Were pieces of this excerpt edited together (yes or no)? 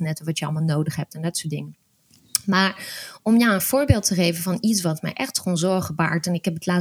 no